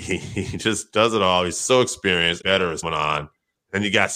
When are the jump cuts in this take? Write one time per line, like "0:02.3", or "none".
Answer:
0:02.4
0:02.8